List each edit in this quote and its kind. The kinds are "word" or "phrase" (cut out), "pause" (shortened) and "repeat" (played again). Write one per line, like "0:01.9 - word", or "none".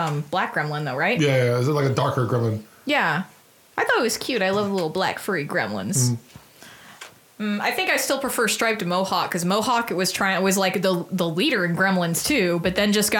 none